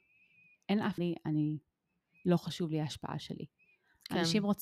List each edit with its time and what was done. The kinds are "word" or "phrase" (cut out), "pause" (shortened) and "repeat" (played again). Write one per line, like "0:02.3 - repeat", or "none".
0:01.0 - phrase